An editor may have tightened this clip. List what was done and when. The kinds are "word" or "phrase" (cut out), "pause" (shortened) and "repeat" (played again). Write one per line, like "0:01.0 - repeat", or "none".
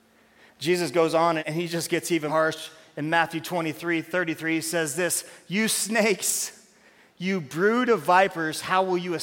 0:01.4 - word
0:02.3 - word